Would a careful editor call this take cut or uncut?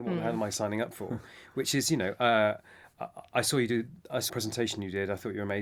cut